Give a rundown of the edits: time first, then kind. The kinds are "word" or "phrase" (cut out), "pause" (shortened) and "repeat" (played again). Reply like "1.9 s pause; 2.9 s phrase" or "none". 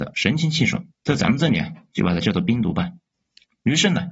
0.9 s pause; 3.1 s pause